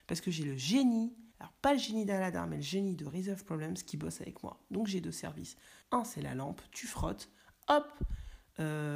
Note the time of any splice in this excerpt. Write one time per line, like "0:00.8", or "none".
0:01.3
0:05.8